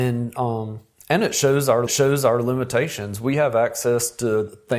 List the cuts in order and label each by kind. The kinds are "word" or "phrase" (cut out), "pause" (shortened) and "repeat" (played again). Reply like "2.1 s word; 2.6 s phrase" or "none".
1.9 s repeat